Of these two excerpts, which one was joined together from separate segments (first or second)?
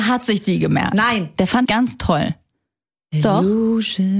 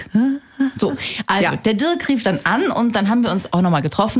first